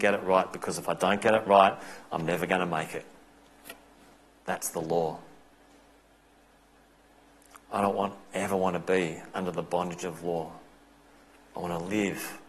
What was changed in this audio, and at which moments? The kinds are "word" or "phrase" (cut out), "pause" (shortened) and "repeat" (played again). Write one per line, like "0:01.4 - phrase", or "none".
none